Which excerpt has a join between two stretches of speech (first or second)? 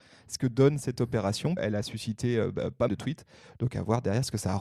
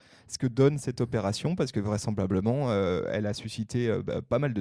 first